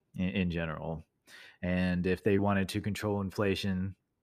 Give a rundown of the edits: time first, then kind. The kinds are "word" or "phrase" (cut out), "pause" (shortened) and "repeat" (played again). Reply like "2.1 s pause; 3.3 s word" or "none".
2.4 s word

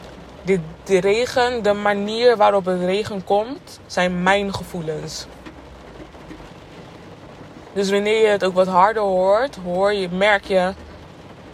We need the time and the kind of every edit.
3.8 s pause

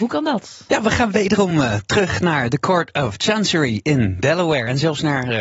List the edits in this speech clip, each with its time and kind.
none

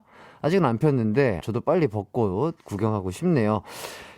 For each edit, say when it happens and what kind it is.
1.4 s word

